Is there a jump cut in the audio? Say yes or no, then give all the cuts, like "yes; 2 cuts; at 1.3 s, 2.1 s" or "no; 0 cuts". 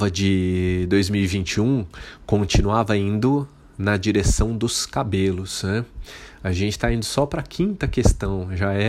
no; 0 cuts